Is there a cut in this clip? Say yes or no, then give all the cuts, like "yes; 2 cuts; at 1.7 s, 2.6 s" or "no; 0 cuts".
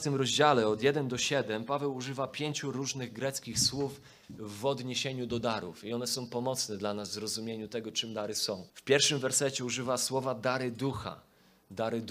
yes; 1 cut; at 8.7 s